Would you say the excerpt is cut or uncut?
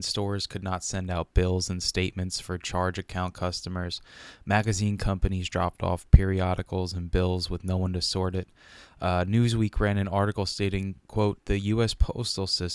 cut